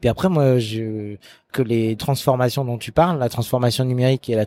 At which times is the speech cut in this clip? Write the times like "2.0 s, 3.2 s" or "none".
1.5 s, 2.0 s